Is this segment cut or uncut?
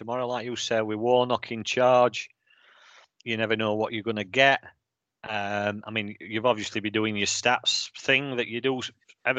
uncut